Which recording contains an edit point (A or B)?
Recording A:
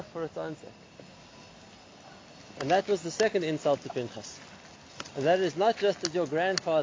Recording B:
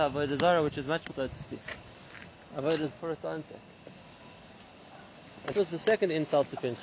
B